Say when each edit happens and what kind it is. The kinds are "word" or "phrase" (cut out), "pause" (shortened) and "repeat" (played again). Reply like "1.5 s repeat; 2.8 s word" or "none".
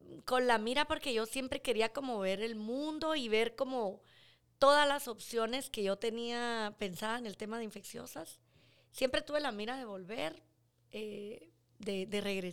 none